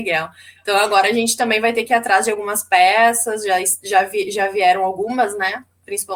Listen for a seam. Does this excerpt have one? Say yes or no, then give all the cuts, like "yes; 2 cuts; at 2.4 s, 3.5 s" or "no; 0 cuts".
no; 0 cuts